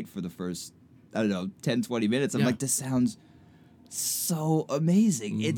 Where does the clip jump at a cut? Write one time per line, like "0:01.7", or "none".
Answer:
none

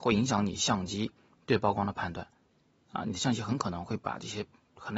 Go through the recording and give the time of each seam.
none

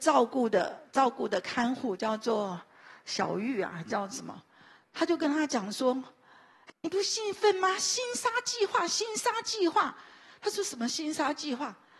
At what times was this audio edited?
0:06.7

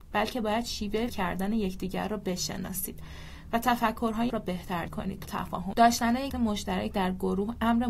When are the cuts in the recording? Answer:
0:01.1
0:04.3
0:04.9
0:05.2
0:05.7
0:06.3

